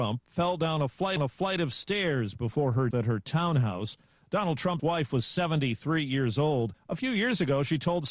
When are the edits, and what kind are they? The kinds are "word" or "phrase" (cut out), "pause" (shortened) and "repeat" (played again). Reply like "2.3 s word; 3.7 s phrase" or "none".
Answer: 1.2 s repeat; 2.9 s word; 4.8 s word